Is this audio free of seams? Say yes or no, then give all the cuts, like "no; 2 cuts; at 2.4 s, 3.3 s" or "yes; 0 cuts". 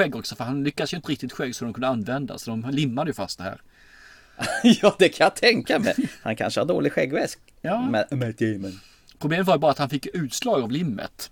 no; 1 cut; at 1.0 s